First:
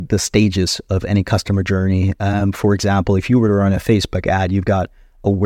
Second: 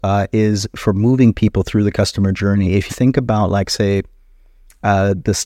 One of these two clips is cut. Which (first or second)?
second